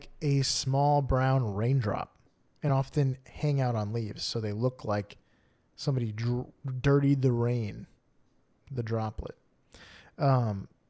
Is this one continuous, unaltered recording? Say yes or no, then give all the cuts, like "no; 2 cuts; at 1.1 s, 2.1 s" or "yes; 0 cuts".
yes; 0 cuts